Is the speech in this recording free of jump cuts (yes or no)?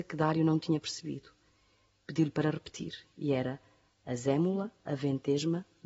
yes